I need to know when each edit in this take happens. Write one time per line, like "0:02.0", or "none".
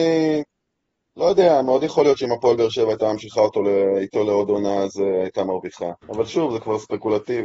0:06.0